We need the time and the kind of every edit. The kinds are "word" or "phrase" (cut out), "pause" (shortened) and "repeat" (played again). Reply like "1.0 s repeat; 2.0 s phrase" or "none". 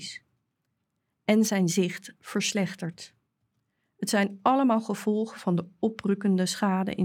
none